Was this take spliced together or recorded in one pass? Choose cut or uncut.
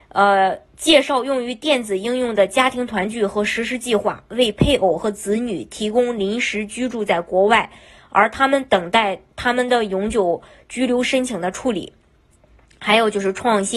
uncut